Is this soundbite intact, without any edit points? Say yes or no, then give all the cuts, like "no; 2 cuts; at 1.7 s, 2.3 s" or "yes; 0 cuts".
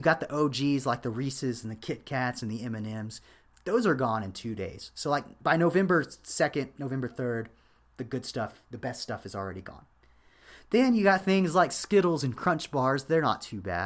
yes; 0 cuts